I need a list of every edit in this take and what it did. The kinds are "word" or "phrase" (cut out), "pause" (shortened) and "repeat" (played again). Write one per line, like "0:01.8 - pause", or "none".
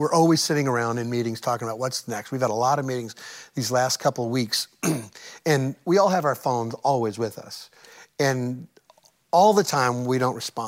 none